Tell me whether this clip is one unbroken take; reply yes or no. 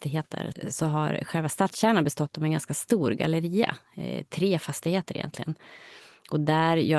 yes